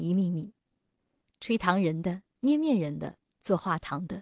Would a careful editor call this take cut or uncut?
cut